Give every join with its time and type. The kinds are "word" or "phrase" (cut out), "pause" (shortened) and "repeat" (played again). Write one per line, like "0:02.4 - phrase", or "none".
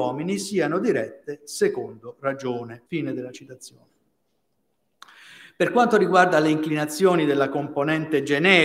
0:02.9 - pause